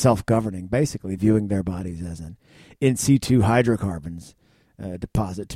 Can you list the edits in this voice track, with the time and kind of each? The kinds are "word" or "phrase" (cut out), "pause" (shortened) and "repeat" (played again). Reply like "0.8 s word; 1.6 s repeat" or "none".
none

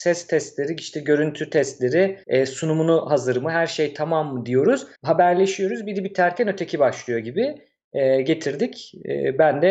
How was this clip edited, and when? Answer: 2.2 s pause; 4.9 s pause

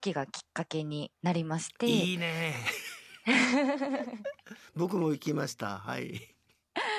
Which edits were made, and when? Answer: 1.2 s pause

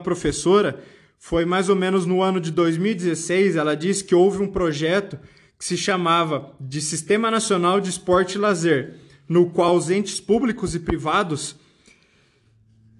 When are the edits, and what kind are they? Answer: none

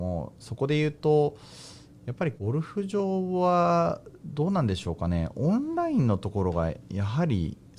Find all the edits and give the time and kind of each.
none

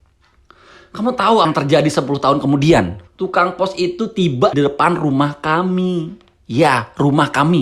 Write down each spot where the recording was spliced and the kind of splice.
1.4 s word; 3.1 s pause; 4.5 s word

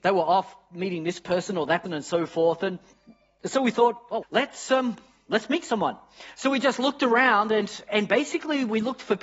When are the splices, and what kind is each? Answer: 1.9 s word; 4.2 s word

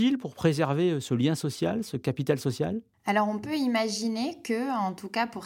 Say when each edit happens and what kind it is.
none

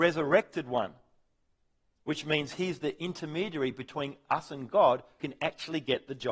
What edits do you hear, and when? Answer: 5.2 s word

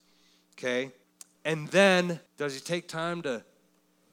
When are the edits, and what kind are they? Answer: 1.0 s pause; 2.3 s pause

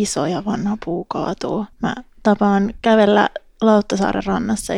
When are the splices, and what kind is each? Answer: 1.7 s pause

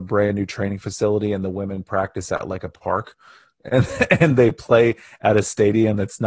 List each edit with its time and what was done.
none

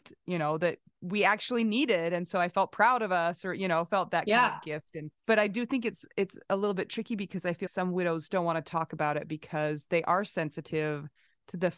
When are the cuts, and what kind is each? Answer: 5.2 s pause; 7.7 s word

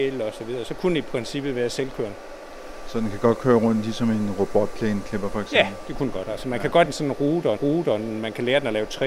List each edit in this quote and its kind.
6.9 s word; 7.6 s repeat

